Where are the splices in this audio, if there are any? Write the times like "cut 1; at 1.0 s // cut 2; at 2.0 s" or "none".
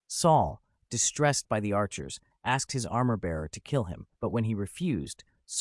cut 1; at 4.1 s